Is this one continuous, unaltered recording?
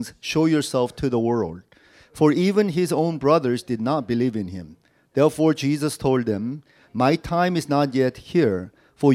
yes; 0 cuts

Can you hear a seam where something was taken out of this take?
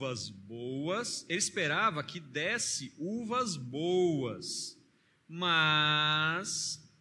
no; 0 cuts

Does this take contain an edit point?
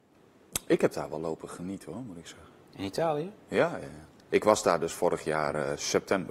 no; 0 cuts

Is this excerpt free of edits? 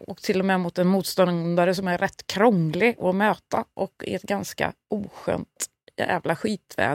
yes; 0 cuts

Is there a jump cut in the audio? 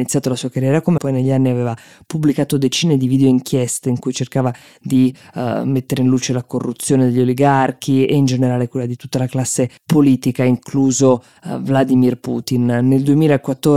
yes; 2 cuts; at 1.0 s, 9.8 s

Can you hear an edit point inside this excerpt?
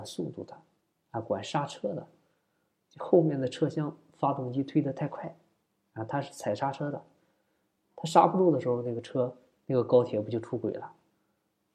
no; 0 cuts

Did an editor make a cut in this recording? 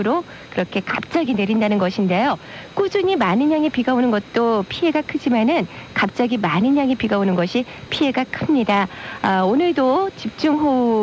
no; 0 cuts

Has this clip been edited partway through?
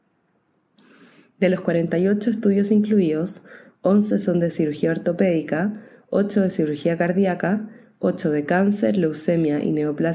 no; 0 cuts

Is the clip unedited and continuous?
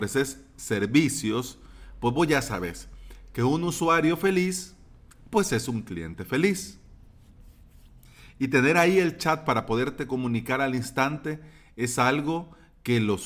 yes; 0 cuts

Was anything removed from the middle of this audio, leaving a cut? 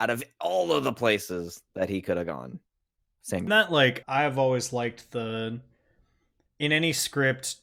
yes; 2 cuts; at 3.5 s, 4.0 s

